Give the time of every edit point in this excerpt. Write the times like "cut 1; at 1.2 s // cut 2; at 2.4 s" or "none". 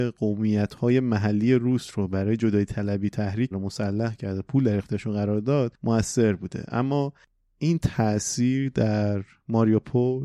cut 1; at 3.5 s